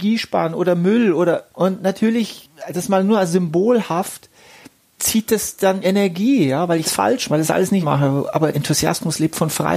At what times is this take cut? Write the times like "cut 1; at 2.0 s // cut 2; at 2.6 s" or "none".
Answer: cut 1; at 5.0 s // cut 2; at 5.8 s // cut 3; at 6.8 s // cut 4; at 7.3 s // cut 5; at 7.8 s // cut 6; at 8.5 s